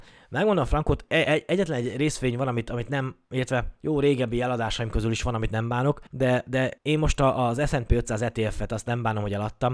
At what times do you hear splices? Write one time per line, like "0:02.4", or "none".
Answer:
0:06.1
0:06.8

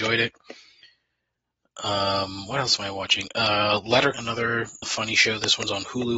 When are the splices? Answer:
0:04.1
0:04.8

